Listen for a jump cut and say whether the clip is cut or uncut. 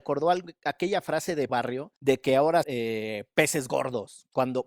cut